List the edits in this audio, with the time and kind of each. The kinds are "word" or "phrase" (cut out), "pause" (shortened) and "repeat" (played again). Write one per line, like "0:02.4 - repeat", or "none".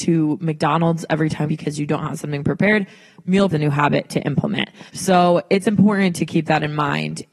0:01.5 - phrase
0:03.5 - phrase
0:04.9 - pause